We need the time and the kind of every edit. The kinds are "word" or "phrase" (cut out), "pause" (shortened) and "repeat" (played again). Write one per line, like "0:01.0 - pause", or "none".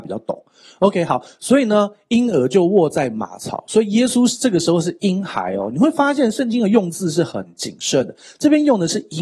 none